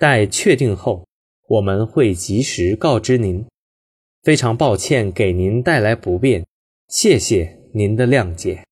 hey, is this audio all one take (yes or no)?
yes